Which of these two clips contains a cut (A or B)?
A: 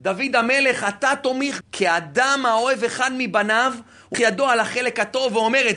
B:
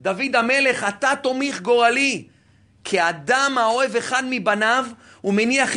A